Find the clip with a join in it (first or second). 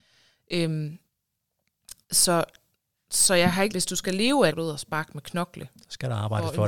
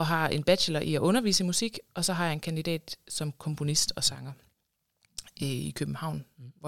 first